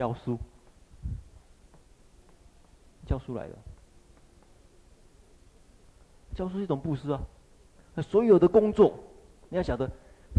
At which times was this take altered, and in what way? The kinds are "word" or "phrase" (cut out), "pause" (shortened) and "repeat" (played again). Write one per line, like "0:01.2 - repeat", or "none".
none